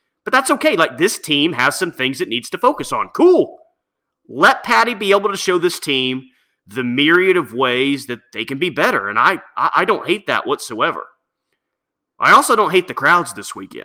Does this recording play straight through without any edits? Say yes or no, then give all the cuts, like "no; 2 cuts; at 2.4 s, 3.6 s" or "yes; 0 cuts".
yes; 0 cuts